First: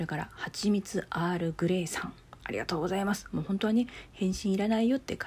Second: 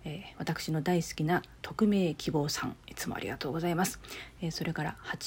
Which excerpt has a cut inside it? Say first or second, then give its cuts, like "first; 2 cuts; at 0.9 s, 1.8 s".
second; 1 cut; at 2.8 s